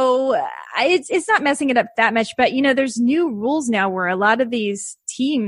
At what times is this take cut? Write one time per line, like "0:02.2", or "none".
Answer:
none